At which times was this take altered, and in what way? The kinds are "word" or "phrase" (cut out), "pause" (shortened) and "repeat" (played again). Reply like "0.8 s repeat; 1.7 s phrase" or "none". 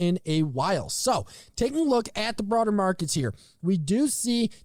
none